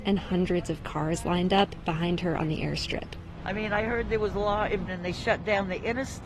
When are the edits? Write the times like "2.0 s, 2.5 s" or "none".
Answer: 4.9 s